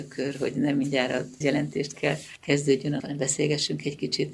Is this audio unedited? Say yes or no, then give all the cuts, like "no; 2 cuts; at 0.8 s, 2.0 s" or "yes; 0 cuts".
no; 3 cuts; at 1.4 s, 1.9 s, 3.0 s